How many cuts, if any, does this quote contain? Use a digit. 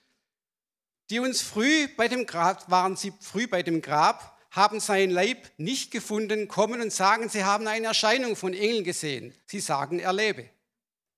1